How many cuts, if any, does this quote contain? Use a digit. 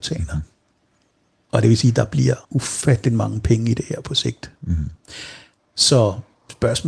1